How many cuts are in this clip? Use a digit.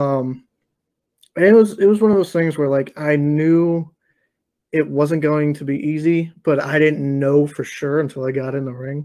0